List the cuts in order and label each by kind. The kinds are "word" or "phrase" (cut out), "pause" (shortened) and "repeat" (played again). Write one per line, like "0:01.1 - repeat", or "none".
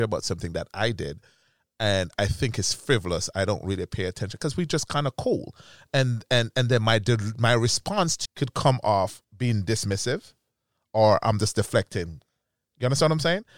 0:08.3 - phrase
0:09.2 - pause